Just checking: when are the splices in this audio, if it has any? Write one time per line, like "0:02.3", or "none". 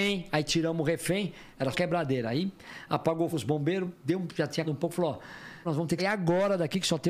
0:01.7
0:03.3
0:04.3
0:04.6
0:05.6
0:06.0